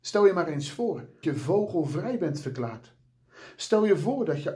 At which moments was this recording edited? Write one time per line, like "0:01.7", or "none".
0:01.2